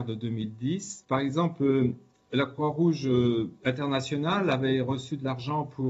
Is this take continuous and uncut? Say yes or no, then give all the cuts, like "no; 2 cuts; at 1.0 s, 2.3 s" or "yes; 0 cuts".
yes; 0 cuts